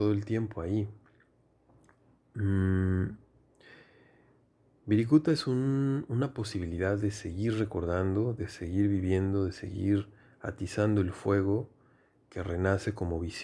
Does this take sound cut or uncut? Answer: uncut